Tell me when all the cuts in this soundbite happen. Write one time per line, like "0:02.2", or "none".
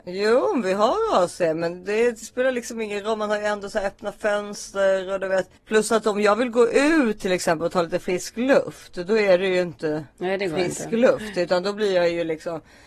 0:05.6